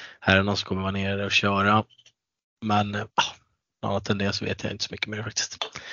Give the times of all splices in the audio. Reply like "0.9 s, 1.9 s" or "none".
3.1 s